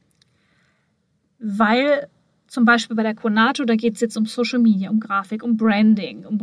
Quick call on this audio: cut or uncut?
uncut